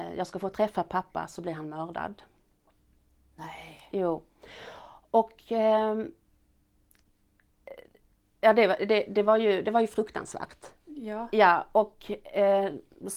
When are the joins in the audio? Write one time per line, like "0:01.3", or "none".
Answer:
none